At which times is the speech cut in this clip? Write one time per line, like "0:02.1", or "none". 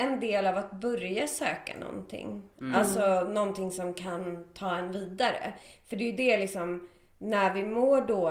none